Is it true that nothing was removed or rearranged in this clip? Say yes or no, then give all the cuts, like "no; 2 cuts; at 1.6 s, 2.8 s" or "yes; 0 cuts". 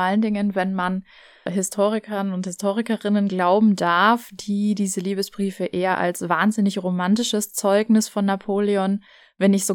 yes; 0 cuts